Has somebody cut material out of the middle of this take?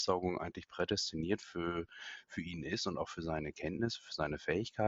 no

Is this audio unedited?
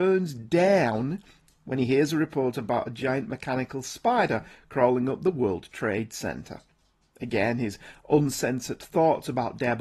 yes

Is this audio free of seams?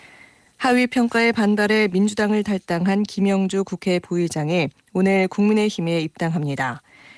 yes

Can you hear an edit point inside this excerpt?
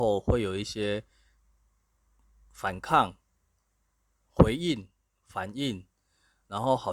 no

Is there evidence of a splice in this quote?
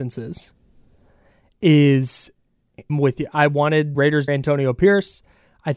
yes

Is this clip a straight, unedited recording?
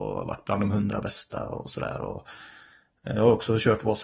yes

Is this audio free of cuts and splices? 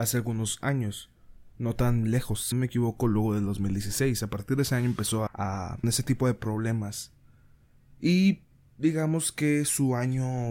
no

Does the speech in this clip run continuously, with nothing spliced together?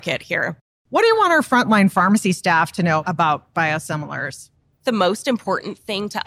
yes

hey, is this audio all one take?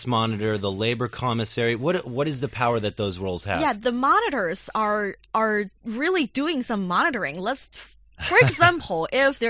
yes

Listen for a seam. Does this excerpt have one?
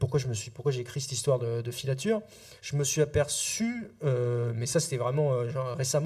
yes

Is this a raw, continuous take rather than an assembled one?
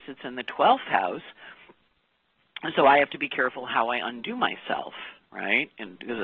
yes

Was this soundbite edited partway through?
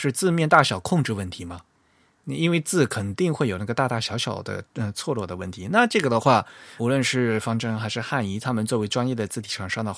yes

